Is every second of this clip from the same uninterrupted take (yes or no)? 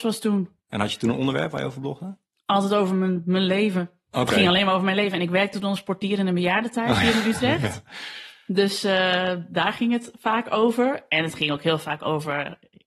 yes